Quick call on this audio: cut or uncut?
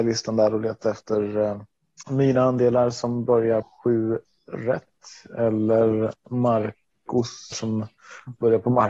cut